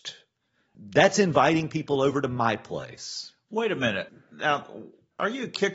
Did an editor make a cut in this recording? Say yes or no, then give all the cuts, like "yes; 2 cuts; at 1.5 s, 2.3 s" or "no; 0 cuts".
no; 0 cuts